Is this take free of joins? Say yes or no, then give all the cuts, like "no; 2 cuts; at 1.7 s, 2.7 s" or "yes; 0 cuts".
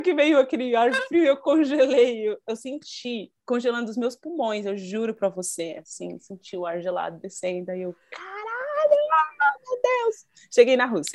no; 1 cut; at 8.0 s